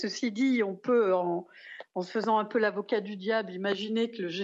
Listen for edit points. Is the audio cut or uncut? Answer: uncut